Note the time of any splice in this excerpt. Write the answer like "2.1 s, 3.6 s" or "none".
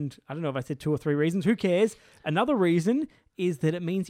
none